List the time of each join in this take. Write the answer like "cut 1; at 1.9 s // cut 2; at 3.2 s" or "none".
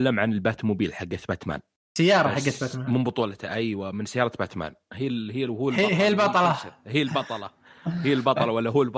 none